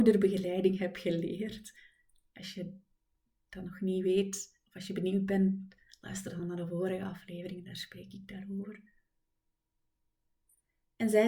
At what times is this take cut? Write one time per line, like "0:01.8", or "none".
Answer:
none